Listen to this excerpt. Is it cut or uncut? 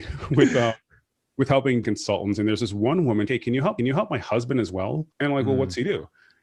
cut